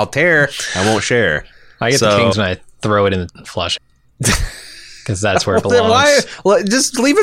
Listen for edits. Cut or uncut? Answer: cut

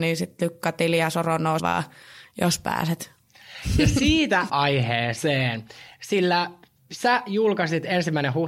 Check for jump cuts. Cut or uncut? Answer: cut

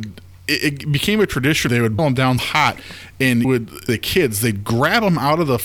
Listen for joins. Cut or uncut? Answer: cut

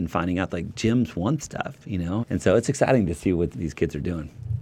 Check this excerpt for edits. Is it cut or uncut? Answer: cut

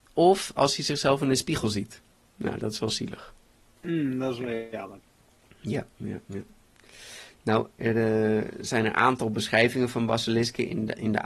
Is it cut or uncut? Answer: uncut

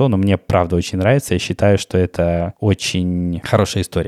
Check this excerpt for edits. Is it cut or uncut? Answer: uncut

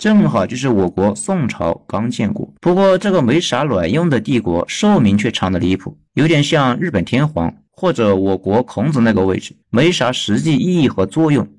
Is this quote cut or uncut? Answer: cut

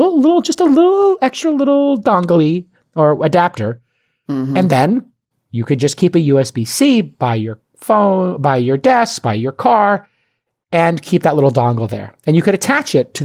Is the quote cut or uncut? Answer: uncut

